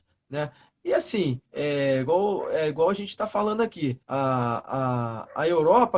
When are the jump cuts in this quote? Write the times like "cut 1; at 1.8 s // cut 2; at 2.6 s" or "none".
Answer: cut 1; at 1.5 s // cut 2; at 4.0 s